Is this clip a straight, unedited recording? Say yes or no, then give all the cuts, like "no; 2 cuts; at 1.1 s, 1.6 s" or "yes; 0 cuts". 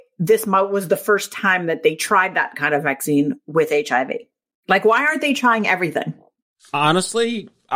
yes; 0 cuts